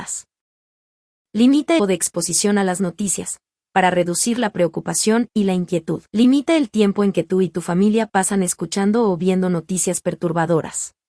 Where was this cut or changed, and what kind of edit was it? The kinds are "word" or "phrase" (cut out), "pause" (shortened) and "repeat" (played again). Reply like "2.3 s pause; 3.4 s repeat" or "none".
1.8 s phrase; 6.1 s pause